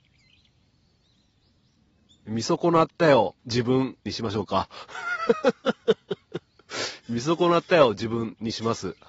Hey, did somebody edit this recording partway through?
yes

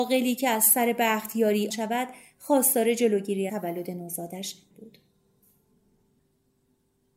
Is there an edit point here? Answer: yes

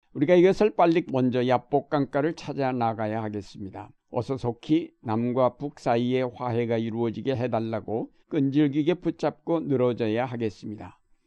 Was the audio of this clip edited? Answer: yes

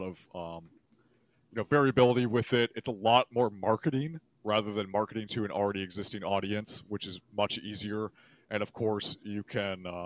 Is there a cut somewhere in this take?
no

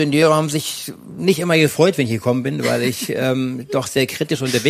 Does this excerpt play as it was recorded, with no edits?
yes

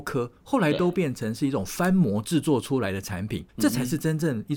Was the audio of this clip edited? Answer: yes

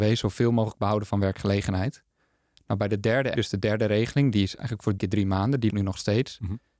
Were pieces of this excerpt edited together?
yes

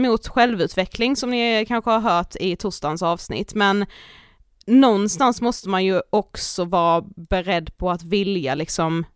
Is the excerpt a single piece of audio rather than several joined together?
yes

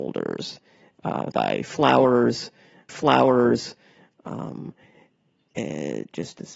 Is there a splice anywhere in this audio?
yes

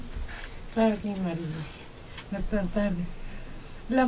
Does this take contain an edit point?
yes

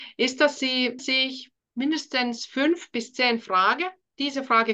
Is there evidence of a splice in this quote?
yes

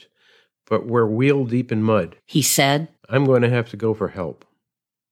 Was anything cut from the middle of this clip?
yes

